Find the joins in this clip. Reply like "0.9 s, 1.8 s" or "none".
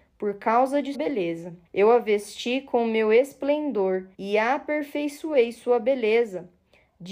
0.9 s, 1.6 s, 4.1 s